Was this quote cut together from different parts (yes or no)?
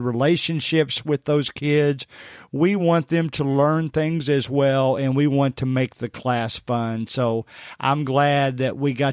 no